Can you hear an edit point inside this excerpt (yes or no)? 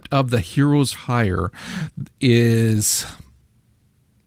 yes